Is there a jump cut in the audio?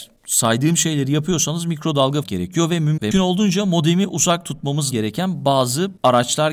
yes; 3 cuts; at 2.2 s, 3.1 s, 4.9 s

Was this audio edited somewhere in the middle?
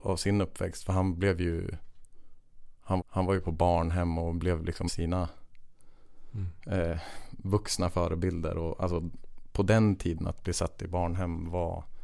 yes; 2 cuts; at 3.0 s, 4.9 s

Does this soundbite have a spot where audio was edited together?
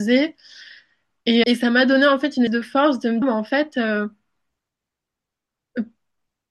yes; 3 cuts; at 1.4 s, 2.5 s, 3.2 s

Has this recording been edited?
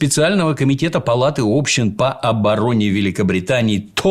no; 0 cuts

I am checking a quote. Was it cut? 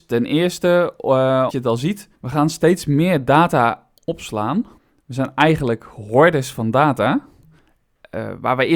yes; 3 cuts; at 1.5 s, 2.1 s, 4.8 s

